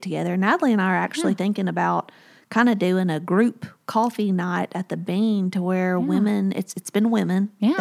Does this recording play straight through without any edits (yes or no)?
yes